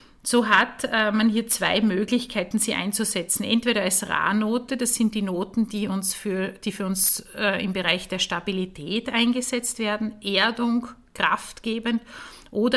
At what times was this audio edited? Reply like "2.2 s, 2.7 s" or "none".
none